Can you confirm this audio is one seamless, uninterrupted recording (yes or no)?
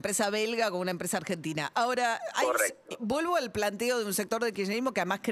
yes